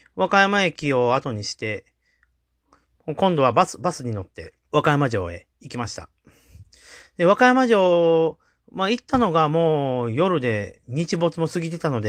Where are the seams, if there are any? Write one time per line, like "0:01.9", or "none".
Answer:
0:04.6